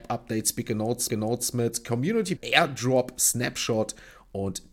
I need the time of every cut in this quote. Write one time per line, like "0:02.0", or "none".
0:01.1
0:02.4

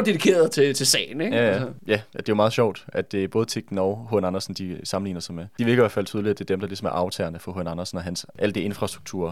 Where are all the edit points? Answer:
none

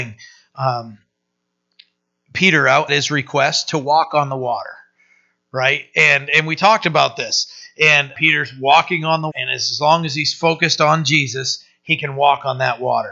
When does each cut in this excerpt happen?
0:02.9
0:08.1
0:09.3

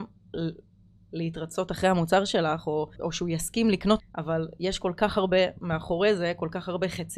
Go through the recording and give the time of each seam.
0:02.9
0:04.0

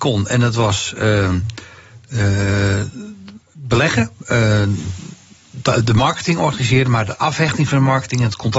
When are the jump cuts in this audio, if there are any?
0:03.4

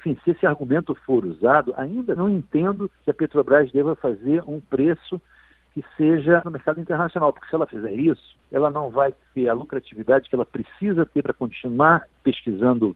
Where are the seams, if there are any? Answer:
0:02.2
0:03.0
0:06.4
0:08.4

